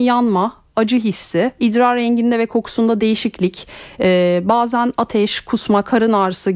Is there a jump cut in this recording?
no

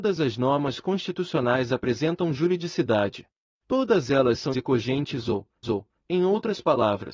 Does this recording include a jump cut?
yes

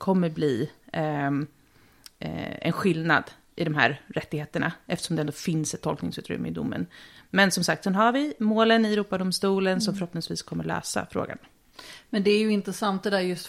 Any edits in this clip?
no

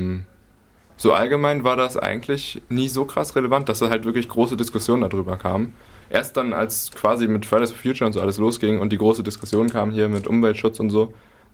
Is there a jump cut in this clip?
no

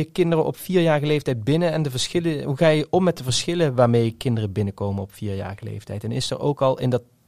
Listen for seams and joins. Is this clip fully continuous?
yes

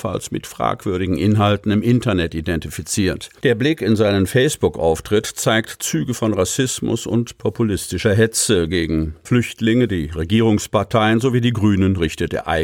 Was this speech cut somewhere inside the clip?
yes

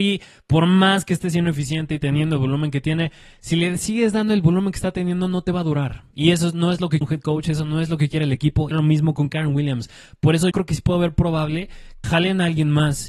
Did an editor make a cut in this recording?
yes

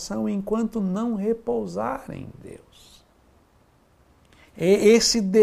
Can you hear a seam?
no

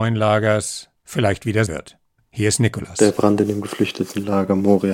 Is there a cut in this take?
yes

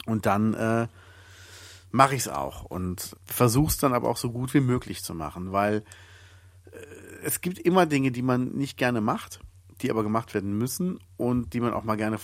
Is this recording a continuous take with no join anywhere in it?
no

